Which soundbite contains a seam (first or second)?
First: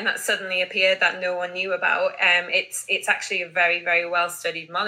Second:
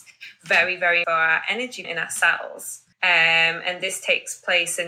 second